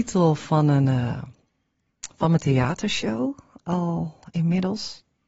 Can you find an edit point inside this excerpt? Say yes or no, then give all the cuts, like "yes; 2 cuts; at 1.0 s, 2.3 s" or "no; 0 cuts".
no; 0 cuts